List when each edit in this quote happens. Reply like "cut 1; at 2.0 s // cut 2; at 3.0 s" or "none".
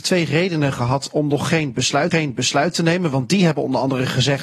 cut 1; at 2.1 s